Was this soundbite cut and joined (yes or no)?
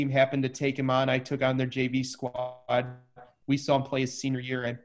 no